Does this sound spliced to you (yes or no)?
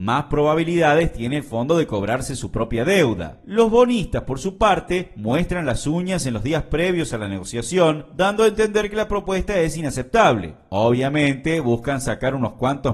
no